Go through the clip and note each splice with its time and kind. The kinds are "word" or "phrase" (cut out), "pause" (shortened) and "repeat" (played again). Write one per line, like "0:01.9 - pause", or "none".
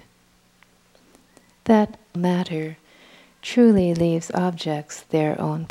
0:02.2 - word